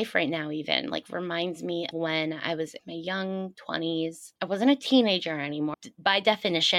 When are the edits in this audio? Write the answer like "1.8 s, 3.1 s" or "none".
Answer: 1.9 s, 2.8 s, 4.4 s, 5.7 s